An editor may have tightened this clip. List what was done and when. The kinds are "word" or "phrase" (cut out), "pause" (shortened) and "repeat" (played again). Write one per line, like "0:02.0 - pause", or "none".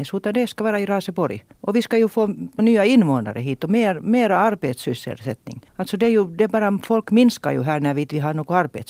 0:01.5 - pause
0:02.6 - phrase
0:05.7 - pause